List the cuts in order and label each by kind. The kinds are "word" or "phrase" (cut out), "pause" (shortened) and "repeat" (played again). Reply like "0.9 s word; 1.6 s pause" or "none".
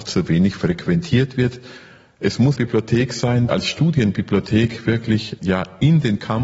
2.6 s word; 3.5 s word; 5.4 s word